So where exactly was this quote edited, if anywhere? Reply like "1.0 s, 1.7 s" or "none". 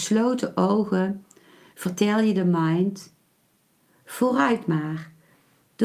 none